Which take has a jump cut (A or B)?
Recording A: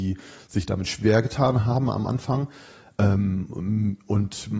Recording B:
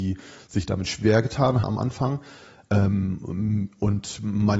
B